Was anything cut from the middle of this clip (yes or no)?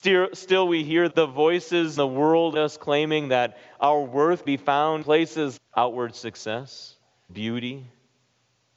yes